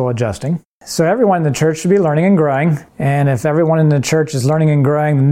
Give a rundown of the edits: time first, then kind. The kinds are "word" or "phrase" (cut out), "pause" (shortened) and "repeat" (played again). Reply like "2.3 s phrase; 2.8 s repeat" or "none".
2.9 s pause